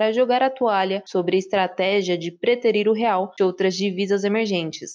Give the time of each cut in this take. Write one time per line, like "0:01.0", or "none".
0:03.4